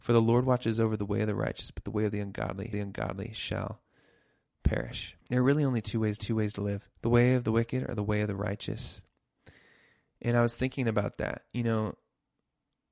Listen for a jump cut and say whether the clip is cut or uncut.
cut